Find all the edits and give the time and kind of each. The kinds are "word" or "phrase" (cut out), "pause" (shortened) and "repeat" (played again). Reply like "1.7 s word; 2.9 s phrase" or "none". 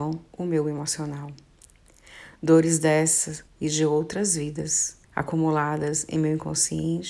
3.5 s pause; 5.0 s pause